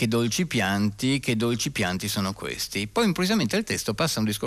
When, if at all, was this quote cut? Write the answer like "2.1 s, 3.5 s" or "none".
none